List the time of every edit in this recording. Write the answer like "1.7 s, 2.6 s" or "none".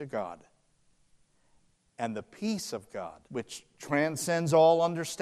3.3 s